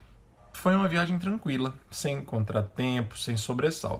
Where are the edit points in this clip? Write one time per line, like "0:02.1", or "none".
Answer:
0:01.8